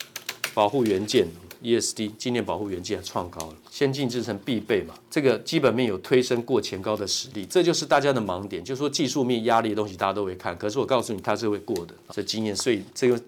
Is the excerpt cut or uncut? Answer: cut